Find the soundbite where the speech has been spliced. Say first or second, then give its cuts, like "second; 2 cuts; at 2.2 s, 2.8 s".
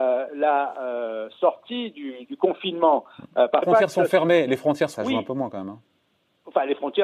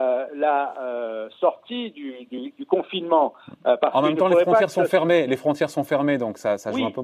first; 3 cuts; at 2.2 s, 3.6 s, 5.0 s